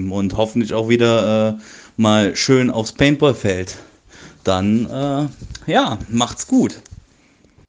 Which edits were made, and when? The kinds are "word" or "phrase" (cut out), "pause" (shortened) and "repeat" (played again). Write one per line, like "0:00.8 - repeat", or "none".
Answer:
none